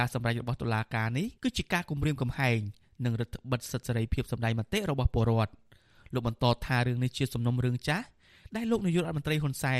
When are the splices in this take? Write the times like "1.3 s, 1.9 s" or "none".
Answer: 1.4 s